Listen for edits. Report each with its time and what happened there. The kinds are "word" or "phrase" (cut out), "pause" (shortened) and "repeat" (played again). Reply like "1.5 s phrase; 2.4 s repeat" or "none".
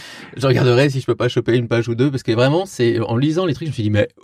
none